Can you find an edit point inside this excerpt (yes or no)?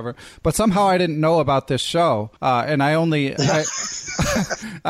yes